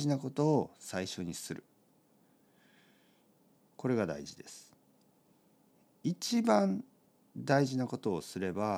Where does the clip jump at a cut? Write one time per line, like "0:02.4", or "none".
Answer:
none

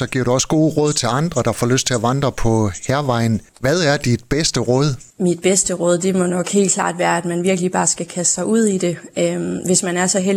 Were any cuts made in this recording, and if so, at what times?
0:03.5
0:05.1

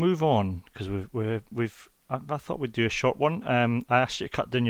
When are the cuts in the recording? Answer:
none

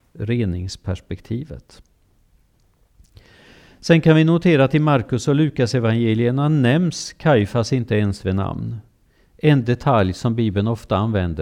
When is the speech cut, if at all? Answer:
none

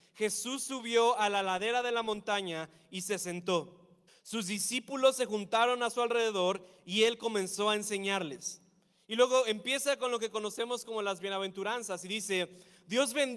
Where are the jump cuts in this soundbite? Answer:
0:04.1

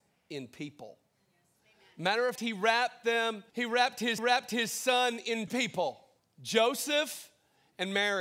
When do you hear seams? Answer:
0:01.6
0:02.4
0:03.5
0:04.2
0:05.5
0:06.2

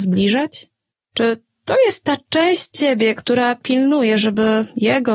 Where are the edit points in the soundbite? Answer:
0:00.9

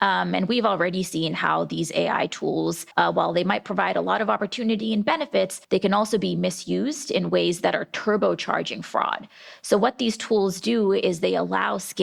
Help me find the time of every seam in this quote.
0:02.9
0:05.6

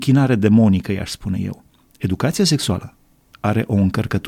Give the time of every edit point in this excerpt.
none

